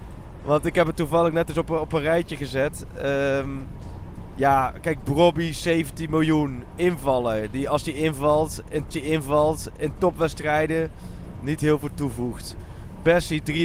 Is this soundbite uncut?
no; 1 cut; at 8.9 s

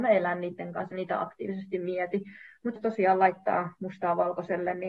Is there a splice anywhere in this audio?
yes; 2 cuts; at 0.9 s, 2.8 s

